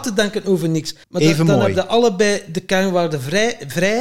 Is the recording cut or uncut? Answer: cut